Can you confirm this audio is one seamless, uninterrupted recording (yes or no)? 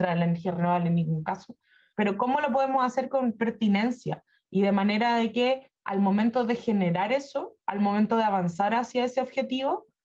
yes